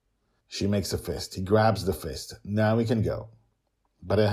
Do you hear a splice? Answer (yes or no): no